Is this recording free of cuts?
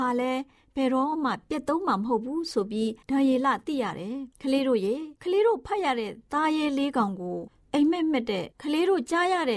no; 4 cuts; at 3.0 s, 4.3 s, 5.2 s, 8.5 s

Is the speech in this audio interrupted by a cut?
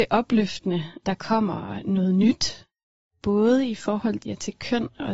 yes; 2 cuts; at 1.0 s, 4.2 s

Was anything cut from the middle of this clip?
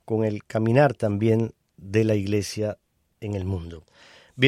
no; 0 cuts

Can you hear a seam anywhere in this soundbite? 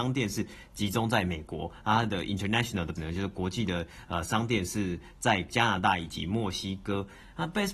yes; 1 cut; at 3.0 s

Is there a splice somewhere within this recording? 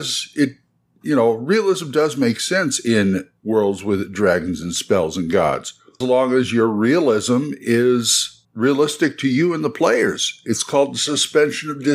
yes; 3 cuts; at 3.4 s, 6.0 s, 8.4 s

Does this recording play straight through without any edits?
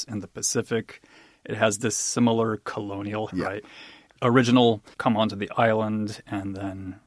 no; 2 cuts; at 3.3 s, 4.9 s

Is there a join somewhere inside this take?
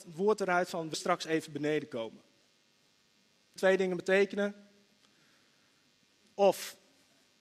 yes; 2 cuts; at 0.9 s, 3.6 s

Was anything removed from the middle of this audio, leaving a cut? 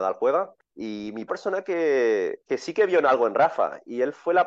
yes; 2 cuts; at 1.3 s, 2.4 s

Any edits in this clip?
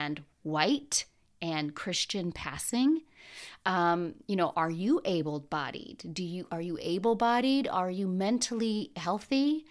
no; 0 cuts

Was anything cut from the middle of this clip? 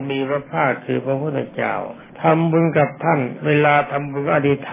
yes; 1 cut; at 2.1 s

